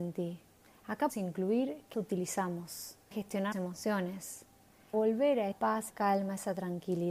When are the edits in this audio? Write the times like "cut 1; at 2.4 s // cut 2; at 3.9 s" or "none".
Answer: cut 1; at 1.1 s // cut 2; at 1.9 s // cut 3; at 3.1 s // cut 4; at 3.5 s // cut 5; at 4.9 s // cut 6; at 5.5 s // cut 7; at 5.9 s